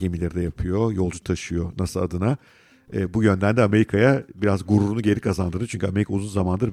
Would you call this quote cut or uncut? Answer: uncut